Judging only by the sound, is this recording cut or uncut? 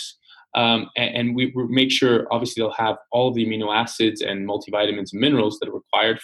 uncut